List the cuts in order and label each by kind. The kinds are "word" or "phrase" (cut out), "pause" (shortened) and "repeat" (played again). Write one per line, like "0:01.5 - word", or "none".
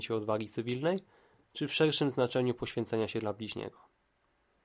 none